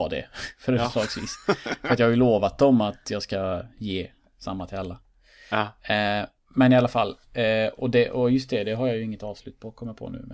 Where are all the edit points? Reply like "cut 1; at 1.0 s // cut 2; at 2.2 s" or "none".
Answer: none

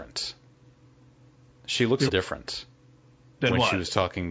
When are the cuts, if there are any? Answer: cut 1; at 2.1 s

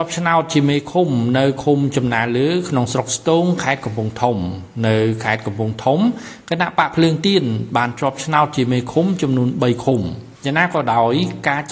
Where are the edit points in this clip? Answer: cut 1; at 10.3 s

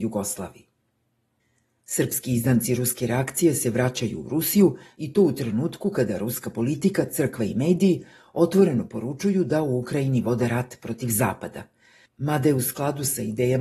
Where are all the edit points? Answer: none

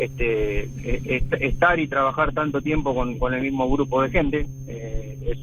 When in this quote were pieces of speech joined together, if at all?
none

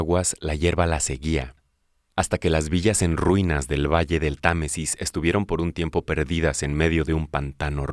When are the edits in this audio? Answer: none

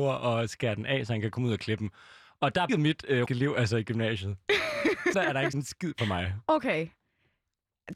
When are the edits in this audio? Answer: cut 1; at 2.7 s // cut 2; at 3.3 s // cut 3; at 5.1 s // cut 4; at 5.5 s // cut 5; at 6.0 s

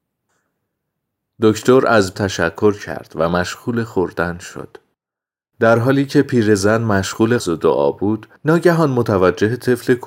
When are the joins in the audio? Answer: cut 1; at 2.1 s // cut 2; at 7.4 s // cut 3; at 8.4 s

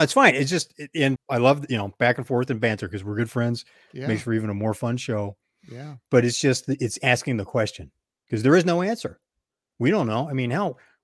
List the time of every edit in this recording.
cut 1; at 1.2 s

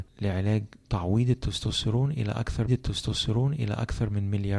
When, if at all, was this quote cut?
cut 1; at 2.7 s

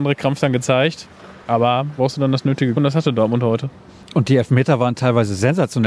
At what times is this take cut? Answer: cut 1; at 2.0 s // cut 2; at 2.7 s // cut 3; at 3.9 s

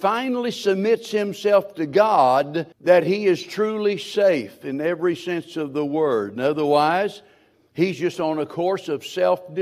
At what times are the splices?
cut 1; at 2.7 s

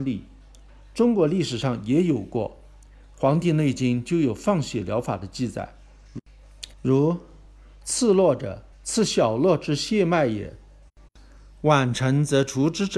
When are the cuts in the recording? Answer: cut 1; at 6.7 s // cut 2; at 8.7 s

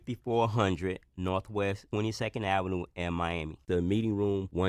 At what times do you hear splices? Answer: none

